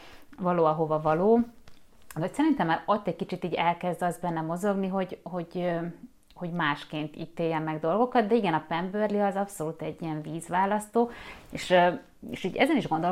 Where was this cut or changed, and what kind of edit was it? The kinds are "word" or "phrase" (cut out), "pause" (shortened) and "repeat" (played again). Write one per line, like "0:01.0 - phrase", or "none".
none